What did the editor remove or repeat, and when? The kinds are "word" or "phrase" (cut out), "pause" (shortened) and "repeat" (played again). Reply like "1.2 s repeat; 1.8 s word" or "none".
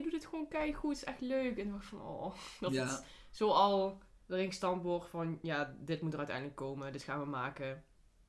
none